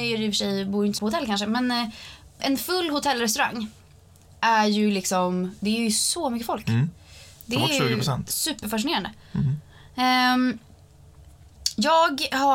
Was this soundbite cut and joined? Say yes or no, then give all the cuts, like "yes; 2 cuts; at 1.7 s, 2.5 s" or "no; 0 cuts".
yes; 2 cuts; at 1.0 s, 2.4 s